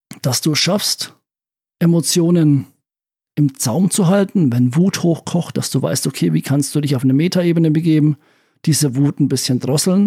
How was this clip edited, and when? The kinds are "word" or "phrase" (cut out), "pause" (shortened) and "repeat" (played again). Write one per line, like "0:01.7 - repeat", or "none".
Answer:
none